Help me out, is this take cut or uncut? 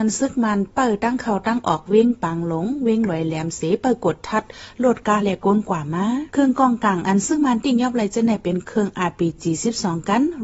cut